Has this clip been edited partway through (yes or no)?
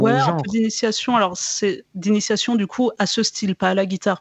no